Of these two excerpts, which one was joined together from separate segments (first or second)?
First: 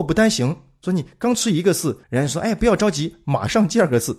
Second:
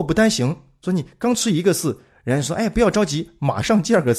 first